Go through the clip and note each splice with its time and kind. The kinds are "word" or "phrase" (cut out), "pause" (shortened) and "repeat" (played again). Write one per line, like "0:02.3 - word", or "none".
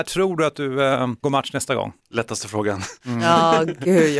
0:01.2 - phrase
0:02.0 - pause

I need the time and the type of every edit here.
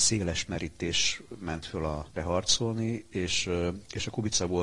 0:02.1 - word

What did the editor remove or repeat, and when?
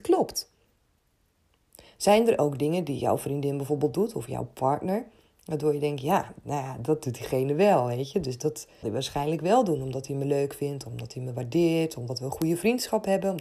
0:08.8 - word

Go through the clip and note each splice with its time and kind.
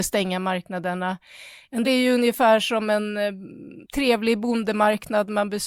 0:01.8 - word
0:03.8 - word

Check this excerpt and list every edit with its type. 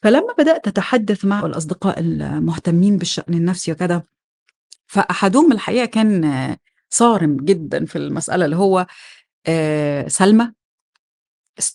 0:01.4 - word

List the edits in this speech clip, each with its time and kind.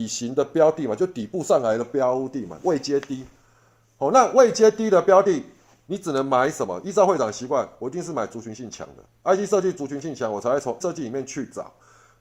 0:10.8 - word

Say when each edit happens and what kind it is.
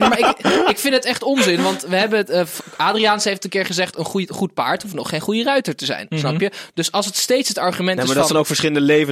none

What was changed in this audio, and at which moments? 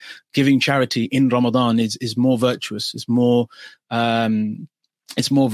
none

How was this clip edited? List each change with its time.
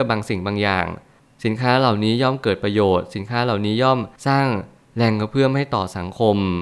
0:04.2 - pause

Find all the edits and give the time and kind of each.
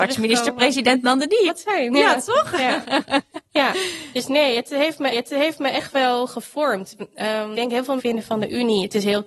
0:01.5 - phrase
0:05.1 - repeat
0:07.5 - word
0:08.0 - word

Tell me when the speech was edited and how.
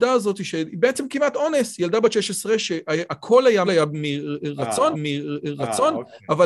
0:03.7 - phrase
0:04.9 - repeat

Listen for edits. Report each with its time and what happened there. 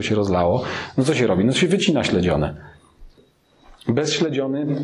none

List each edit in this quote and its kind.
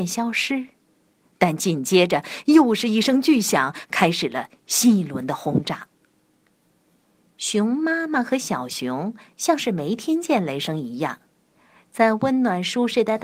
none

